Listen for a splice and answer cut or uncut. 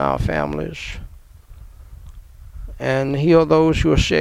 uncut